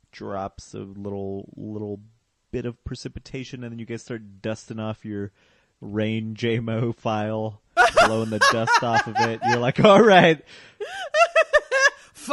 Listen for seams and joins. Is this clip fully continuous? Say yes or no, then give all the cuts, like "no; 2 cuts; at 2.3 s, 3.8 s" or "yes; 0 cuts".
yes; 0 cuts